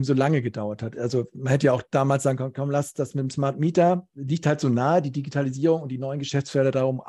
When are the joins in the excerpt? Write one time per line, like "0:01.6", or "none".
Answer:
none